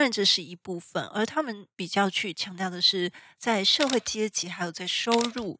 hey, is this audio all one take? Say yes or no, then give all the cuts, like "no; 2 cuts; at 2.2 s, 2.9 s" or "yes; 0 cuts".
yes; 0 cuts